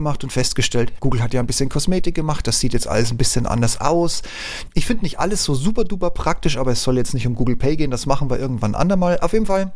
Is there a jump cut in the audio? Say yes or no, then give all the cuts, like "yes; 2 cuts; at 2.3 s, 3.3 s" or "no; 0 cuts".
yes; 1 cut; at 1.0 s